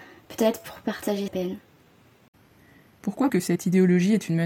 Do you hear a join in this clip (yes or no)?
yes